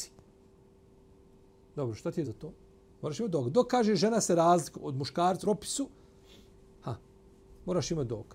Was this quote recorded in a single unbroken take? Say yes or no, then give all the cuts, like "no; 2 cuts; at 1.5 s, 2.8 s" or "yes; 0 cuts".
no; 3 cuts; at 2.2 s, 4.7 s, 5.4 s